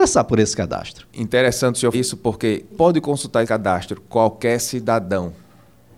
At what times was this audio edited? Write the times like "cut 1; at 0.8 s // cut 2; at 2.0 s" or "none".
cut 1; at 1.9 s // cut 2; at 2.7 s // cut 3; at 3.4 s